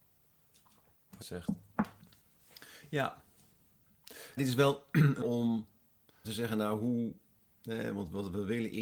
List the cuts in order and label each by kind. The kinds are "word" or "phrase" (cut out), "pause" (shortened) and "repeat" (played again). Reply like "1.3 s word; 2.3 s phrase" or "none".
1.2 s word; 4.4 s word; 5.2 s word; 6.2 s word